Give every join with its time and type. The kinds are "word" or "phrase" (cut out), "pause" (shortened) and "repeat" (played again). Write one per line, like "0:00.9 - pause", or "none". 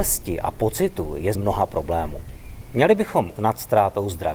0:01.3 - word
0:03.4 - word